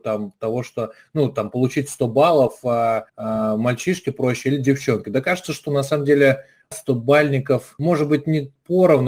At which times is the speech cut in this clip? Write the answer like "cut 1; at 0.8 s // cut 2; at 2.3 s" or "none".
cut 1; at 3.1 s // cut 2; at 6.7 s